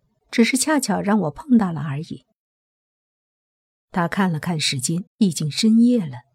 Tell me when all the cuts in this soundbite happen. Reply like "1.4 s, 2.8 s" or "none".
5.1 s